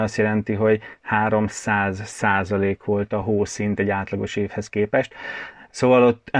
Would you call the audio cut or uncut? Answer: uncut